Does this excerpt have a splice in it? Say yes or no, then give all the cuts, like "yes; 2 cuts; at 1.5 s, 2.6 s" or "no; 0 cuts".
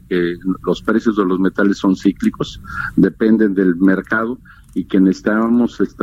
no; 0 cuts